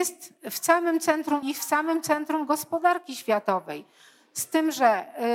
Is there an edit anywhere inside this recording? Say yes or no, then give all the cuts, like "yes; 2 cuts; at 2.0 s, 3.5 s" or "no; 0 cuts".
yes; 1 cut; at 1.4 s